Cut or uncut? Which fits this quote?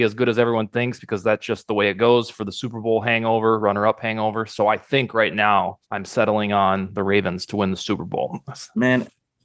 cut